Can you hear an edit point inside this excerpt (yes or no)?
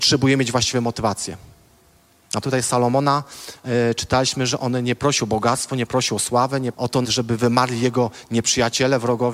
yes